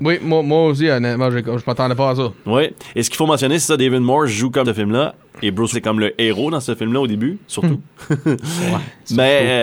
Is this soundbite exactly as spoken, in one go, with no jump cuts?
no; 2 cuts; at 4.6 s, 5.7 s

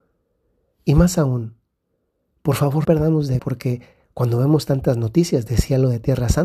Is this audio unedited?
no; 2 cuts; at 2.8 s, 3.4 s

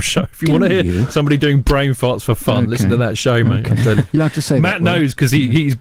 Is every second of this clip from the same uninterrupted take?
yes; 0 cuts

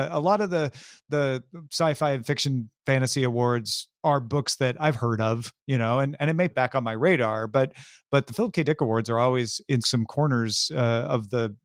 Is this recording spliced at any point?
yes; 2 cuts; at 6.5 s, 9.8 s

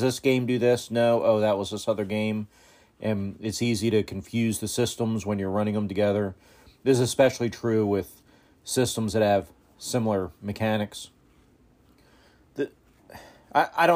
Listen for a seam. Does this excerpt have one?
no; 0 cuts

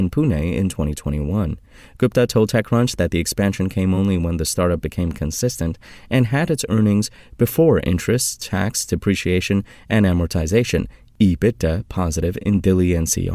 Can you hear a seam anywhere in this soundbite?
no; 0 cuts

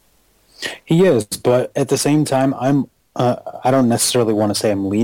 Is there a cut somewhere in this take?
no; 0 cuts

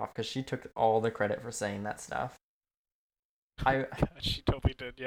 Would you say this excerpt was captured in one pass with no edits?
yes; 0 cuts

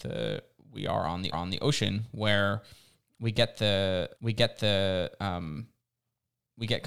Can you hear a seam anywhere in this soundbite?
yes; 2 cuts; at 1.3 s, 4.1 s

